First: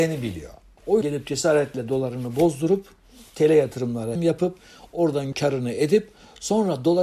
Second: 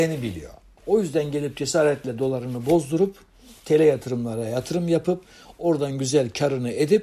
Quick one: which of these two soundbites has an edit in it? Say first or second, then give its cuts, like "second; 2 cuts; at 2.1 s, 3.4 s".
first; 3 cuts; at 1.0 s, 4.1 s, 5.3 s